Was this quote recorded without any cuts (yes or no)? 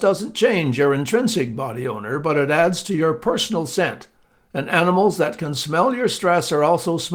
yes